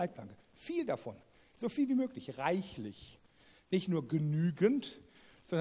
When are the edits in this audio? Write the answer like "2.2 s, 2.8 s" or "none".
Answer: none